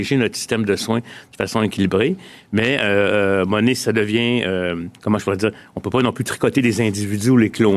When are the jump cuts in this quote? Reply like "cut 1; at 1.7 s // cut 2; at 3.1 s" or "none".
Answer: cut 1; at 5.0 s